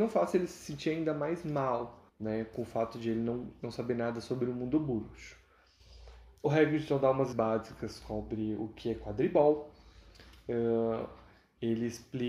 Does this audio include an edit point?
yes; 2 cuts; at 2.1 s, 7.3 s

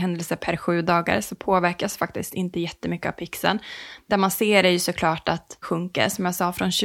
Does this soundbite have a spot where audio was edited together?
yes; 1 cut; at 5.6 s

